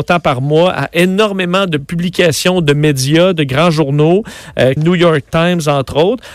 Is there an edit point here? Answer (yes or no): yes